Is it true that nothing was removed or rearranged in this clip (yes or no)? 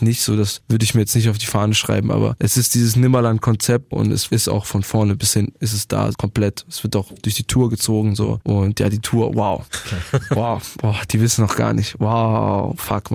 no